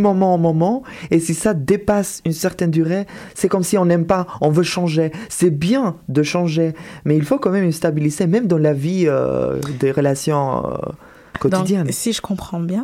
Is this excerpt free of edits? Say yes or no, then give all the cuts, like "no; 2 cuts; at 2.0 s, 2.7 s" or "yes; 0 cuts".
yes; 0 cuts